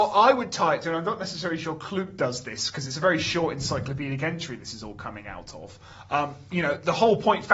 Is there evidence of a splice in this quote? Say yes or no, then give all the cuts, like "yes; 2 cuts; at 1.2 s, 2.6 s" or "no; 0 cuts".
no; 0 cuts